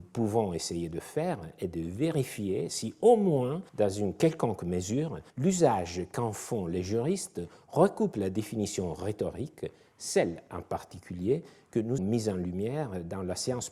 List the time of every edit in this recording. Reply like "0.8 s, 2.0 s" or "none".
3.7 s, 5.3 s, 12.0 s